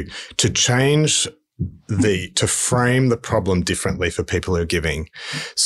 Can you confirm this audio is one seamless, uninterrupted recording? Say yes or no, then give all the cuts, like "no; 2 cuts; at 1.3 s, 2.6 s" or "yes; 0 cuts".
yes; 0 cuts